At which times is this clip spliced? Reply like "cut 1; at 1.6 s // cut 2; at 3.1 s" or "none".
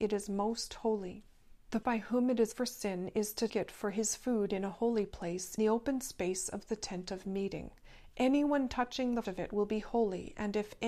cut 1; at 1.8 s // cut 2; at 2.5 s // cut 3; at 3.5 s // cut 4; at 5.6 s // cut 5; at 9.2 s